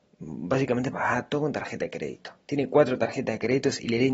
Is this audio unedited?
yes; 0 cuts

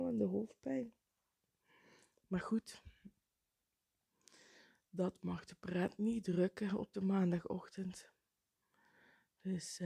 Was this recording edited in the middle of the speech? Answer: no; 0 cuts

